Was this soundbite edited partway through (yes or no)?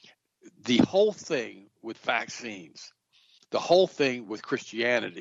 no